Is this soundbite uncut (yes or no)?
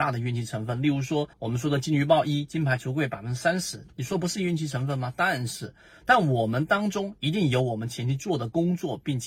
no